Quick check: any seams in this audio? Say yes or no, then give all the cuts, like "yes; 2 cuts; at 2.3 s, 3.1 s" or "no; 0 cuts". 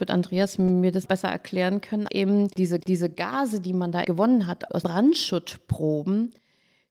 yes; 5 cuts; at 1.1 s, 2.1 s, 2.8 s, 4.0 s, 4.8 s